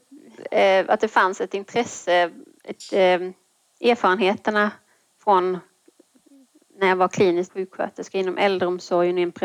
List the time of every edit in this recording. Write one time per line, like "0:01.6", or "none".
0:07.5